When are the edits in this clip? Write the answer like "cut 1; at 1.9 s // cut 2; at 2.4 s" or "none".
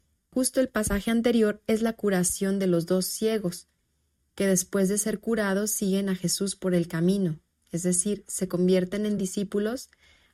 none